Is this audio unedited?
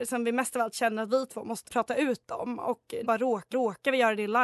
no; 3 cuts; at 1.7 s, 3.0 s, 3.5 s

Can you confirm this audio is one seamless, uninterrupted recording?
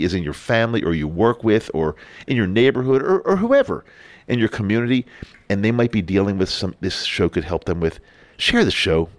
no; 1 cut; at 6.8 s

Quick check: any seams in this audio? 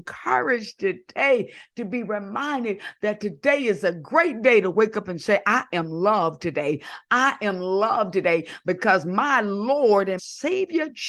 yes; 1 cut; at 10.2 s

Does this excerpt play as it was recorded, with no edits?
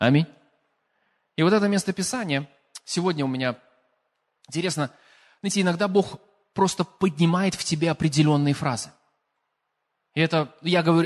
yes; 0 cuts

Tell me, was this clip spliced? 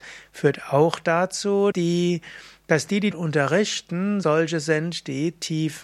yes; 3 cuts; at 1.7 s, 3.1 s, 4.2 s

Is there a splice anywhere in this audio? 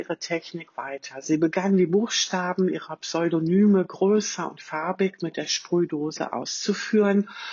no; 0 cuts

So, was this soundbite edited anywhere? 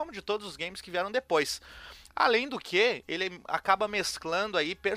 no; 0 cuts

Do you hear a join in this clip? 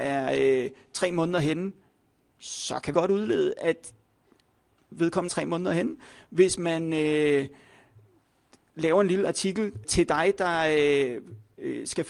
yes; 3 cuts; at 2.9 s, 5.3 s, 9.8 s

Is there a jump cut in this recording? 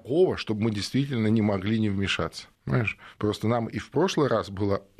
yes; 1 cut; at 2.5 s

